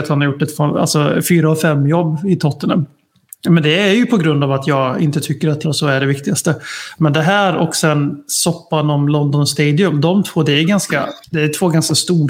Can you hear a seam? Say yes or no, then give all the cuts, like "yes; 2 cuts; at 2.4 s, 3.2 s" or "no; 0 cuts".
yes; 2 cuts; at 5.6 s, 11.2 s